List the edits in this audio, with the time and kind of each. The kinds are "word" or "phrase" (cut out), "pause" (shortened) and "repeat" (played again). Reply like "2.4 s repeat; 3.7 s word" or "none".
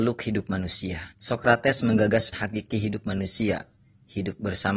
1.1 s pause; 2.3 s word